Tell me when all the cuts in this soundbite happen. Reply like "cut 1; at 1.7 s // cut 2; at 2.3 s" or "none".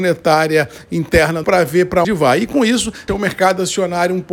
cut 1; at 1.4 s // cut 2; at 2.0 s // cut 3; at 3.1 s